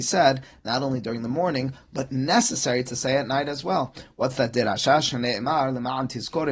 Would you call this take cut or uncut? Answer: uncut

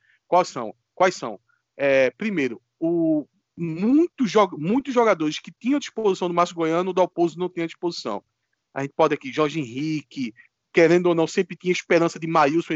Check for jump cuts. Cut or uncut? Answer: uncut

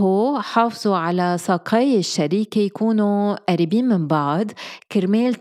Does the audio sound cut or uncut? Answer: uncut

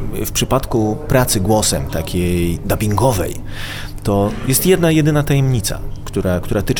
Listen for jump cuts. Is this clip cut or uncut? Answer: uncut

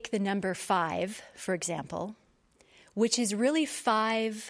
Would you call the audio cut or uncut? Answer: uncut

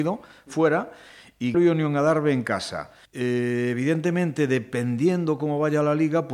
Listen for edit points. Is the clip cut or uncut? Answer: cut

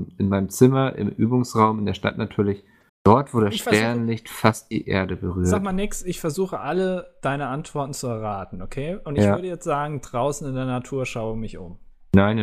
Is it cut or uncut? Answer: cut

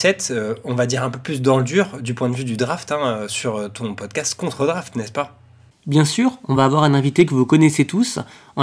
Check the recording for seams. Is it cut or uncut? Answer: uncut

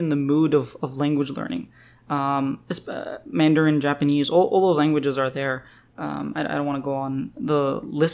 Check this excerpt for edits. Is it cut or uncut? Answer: uncut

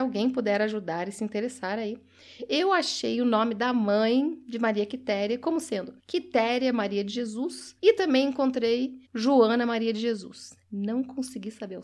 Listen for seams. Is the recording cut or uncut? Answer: cut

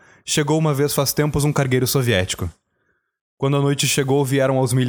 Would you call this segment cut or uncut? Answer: uncut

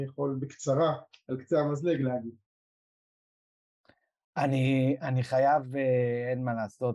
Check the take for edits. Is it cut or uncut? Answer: uncut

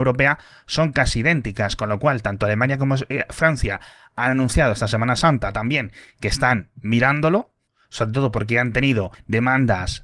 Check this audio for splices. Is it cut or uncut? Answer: uncut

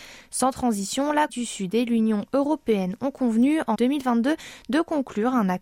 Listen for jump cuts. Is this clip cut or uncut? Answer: cut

